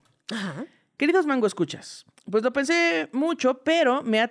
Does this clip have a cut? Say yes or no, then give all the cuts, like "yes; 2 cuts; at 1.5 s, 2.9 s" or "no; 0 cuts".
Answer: no; 0 cuts